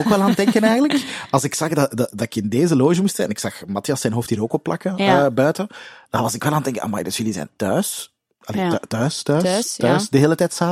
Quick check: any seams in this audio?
no; 0 cuts

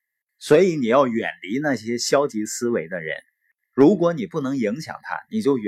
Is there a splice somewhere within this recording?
no; 0 cuts

